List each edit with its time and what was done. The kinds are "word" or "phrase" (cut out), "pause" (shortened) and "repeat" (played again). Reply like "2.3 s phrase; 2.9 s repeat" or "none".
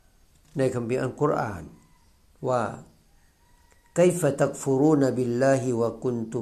none